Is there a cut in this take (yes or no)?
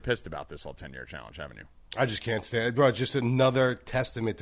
no